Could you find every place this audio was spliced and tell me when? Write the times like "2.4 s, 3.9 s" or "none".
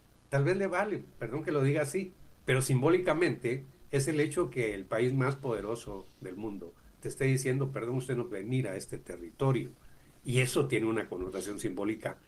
2.3 s, 8.3 s